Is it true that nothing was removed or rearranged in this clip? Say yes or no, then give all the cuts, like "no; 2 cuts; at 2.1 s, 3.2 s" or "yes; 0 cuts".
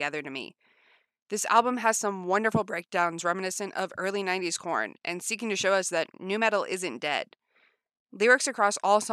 yes; 0 cuts